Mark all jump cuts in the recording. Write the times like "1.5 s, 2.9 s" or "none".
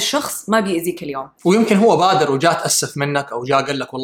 1.3 s